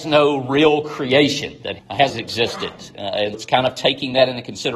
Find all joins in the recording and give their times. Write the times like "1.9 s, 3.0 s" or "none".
1.8 s, 2.1 s, 3.3 s

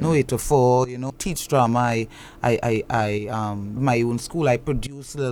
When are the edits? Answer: 1.1 s, 2.9 s, 3.8 s

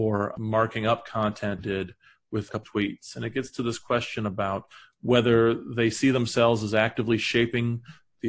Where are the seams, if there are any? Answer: 1.6 s, 2.6 s

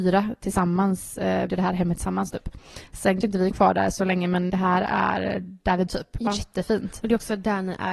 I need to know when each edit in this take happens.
1.5 s, 3.2 s, 3.5 s, 4.5 s, 5.9 s, 6.3 s

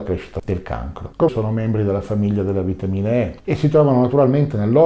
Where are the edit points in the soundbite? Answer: 1.3 s

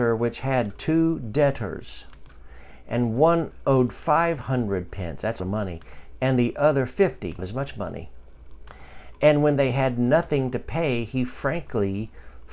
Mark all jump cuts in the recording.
5.4 s, 7.4 s

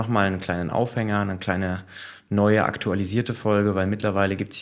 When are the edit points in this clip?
none

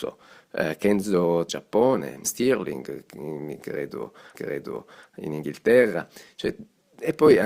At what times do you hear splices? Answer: 1.5 s, 2.2 s, 4.3 s

